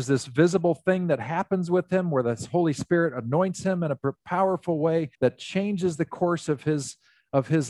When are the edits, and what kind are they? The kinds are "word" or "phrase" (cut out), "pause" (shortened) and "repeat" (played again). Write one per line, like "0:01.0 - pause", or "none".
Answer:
0:05.1 - pause

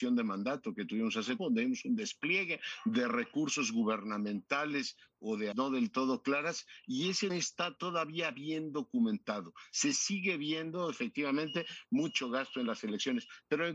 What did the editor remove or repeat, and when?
0:01.4 - word
0:05.5 - word
0:07.3 - phrase

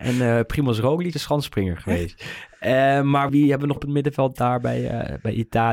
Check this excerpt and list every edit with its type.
0:01.1 - word
0:03.3 - word
0:03.8 - word

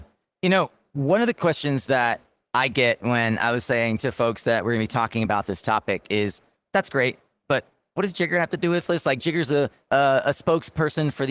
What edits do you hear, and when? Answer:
none

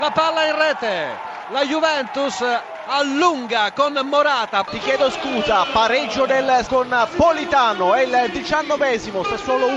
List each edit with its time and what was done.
0:06.7 - word

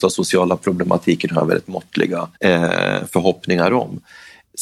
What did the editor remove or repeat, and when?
0:02.4 - pause

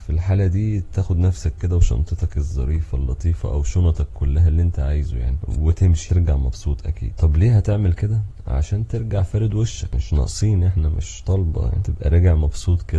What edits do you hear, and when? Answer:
none

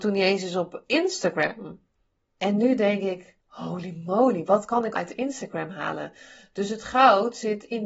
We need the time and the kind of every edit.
0:02.1 - pause
0:03.4 - pause
0:05.0 - word

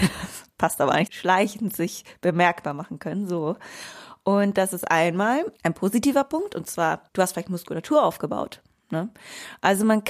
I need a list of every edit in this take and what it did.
0:01.1 - phrase
0:05.6 - pause
0:07.1 - pause

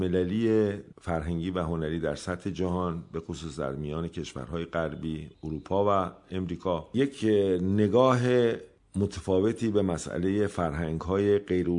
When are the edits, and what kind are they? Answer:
none

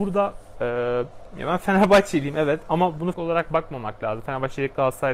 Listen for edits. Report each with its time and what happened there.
0:03.1 - word

